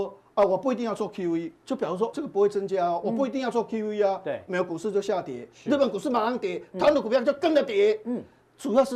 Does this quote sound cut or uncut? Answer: cut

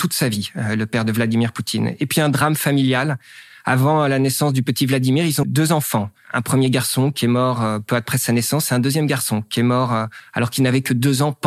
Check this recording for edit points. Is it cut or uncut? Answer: cut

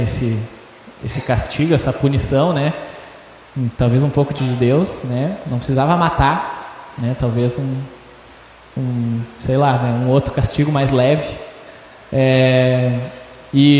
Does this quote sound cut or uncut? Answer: cut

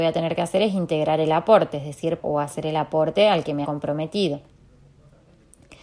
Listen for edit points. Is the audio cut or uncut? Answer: cut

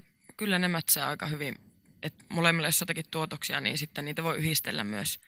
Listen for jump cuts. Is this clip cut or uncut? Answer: uncut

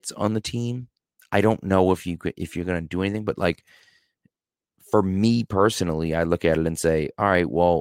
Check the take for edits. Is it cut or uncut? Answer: uncut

